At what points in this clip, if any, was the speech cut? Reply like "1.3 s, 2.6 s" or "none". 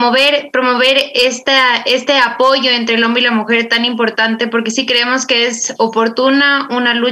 none